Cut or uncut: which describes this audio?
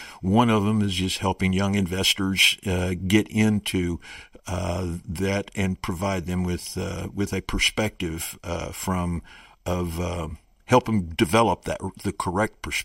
uncut